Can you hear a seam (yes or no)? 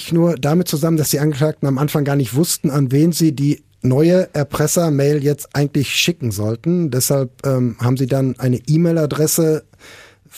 no